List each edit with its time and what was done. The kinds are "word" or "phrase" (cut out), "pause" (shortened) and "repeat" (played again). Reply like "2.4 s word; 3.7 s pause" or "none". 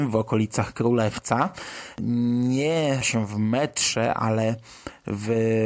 3.0 s word